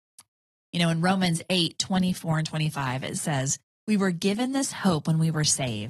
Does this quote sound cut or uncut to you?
cut